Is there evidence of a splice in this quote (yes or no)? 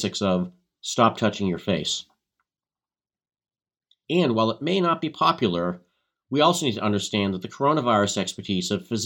no